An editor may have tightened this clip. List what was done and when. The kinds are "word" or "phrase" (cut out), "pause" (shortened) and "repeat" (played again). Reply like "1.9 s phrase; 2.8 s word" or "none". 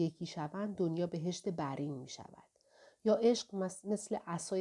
none